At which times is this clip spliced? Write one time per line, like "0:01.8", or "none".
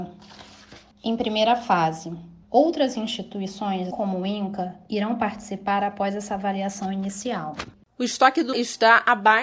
0:02.4
0:03.9
0:08.5